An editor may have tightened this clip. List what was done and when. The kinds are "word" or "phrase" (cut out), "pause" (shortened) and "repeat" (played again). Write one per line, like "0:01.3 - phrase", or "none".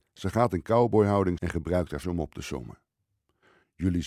0:01.4 - word
0:02.0 - word